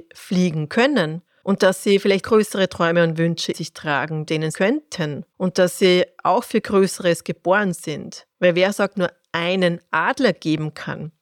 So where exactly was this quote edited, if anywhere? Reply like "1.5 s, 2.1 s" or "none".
1.3 s, 2.2 s, 3.5 s, 4.5 s, 5.3 s, 8.3 s, 8.9 s